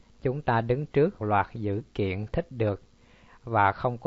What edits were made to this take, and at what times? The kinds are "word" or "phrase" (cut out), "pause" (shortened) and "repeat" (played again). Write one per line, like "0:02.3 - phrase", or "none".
0:01.2 - word
0:02.3 - phrase